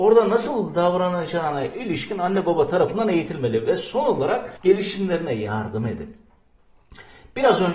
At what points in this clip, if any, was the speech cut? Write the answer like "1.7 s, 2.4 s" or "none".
4.6 s